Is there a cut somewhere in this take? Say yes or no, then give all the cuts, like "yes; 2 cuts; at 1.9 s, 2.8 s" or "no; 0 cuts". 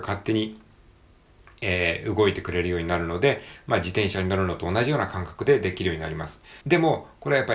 yes; 1 cut; at 6.6 s